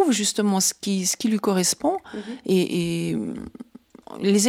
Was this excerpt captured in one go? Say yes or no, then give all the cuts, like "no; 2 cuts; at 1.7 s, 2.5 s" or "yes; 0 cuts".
yes; 0 cuts